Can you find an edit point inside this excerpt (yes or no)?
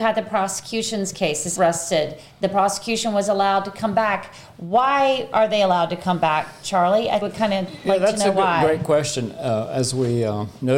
yes